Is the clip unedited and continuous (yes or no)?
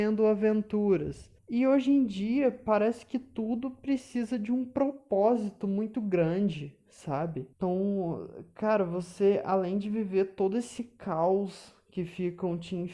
no